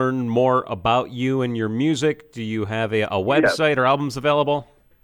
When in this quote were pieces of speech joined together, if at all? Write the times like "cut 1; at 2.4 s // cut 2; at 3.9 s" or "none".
none

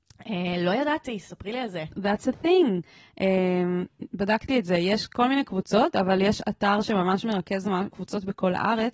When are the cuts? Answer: none

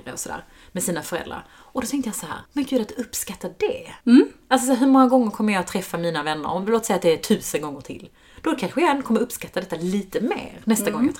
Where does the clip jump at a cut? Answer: cut 1; at 2.5 s // cut 2; at 4.0 s

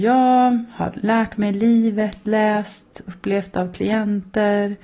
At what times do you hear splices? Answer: none

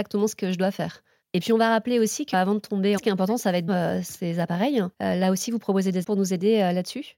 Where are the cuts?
cut 1; at 2.3 s // cut 2; at 3.0 s // cut 3; at 3.7 s // cut 4; at 4.9 s // cut 5; at 6.0 s

